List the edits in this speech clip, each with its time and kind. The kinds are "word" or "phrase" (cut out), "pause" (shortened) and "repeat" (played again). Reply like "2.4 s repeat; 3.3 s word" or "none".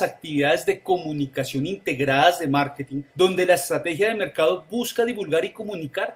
3.1 s pause